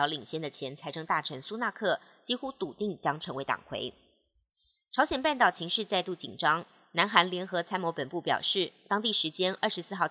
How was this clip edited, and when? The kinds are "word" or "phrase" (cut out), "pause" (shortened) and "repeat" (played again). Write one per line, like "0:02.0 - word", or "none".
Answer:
none